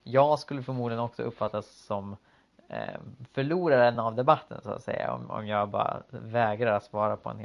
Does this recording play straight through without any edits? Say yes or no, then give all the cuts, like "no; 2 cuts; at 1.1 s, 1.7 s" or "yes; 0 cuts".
yes; 0 cuts